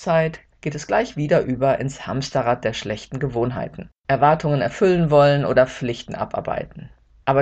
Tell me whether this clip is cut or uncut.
cut